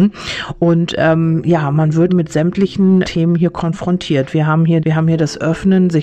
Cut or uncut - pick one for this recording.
cut